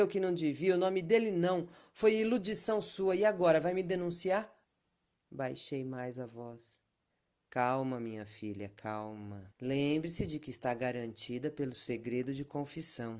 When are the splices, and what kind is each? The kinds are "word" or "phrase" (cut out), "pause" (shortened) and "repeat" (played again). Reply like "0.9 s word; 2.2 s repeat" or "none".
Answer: 4.6 s pause; 7.1 s pause; 9.5 s pause

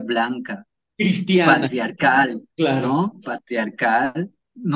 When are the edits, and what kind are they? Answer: 2.5 s pause

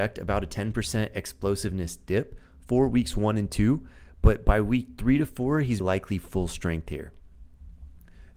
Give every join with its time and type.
5.8 s word

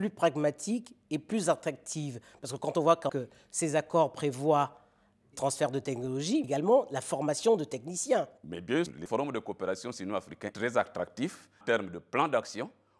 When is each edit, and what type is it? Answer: 3.1 s word; 5.3 s word; 6.4 s word; 8.9 s word; 10.5 s word; 11.6 s word

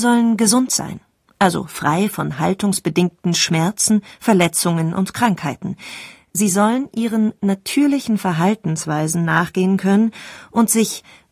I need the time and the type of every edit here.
none

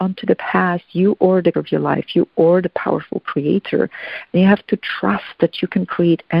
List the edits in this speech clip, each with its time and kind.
1.5 s word

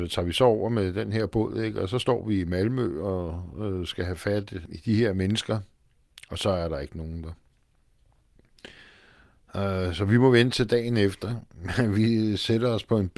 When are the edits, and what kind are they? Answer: none

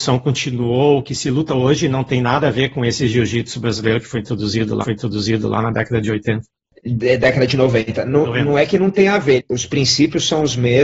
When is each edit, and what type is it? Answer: 4.8 s repeat

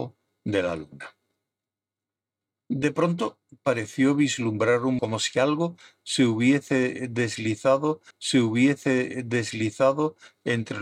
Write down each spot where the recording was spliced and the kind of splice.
5.0 s word; 8.1 s repeat

